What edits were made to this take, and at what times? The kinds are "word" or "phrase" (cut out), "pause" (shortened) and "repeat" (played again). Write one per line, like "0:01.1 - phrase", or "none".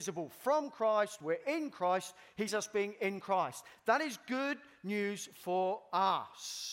0:02.5 - word